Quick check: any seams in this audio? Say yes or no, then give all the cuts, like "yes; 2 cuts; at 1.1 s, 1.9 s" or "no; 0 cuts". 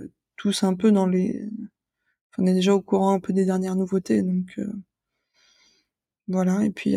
no; 0 cuts